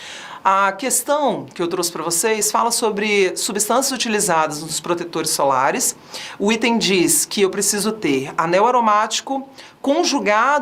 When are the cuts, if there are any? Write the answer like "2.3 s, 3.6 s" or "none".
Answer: none